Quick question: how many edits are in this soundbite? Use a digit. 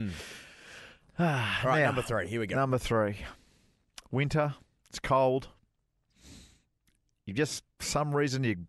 0